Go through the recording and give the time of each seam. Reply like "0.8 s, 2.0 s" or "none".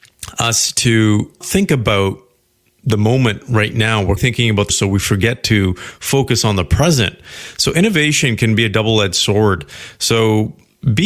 1.4 s, 4.2 s, 4.7 s